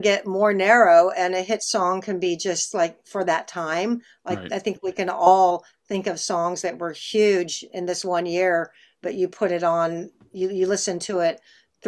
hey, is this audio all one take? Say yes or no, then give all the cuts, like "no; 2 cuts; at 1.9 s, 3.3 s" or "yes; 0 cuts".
yes; 0 cuts